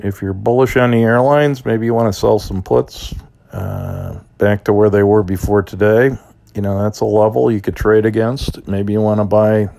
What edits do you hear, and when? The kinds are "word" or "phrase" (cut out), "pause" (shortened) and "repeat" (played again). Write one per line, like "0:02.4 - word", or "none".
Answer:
0:03.3 - pause